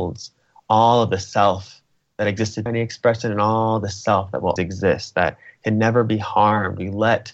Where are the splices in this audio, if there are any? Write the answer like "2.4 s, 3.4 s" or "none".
2.7 s, 4.6 s